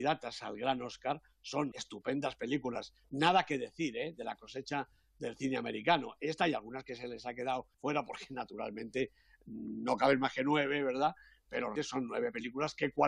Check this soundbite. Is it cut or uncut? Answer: cut